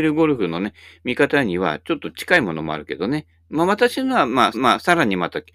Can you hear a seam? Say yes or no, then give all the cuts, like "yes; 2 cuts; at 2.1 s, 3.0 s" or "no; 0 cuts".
yes; 1 cut; at 4.5 s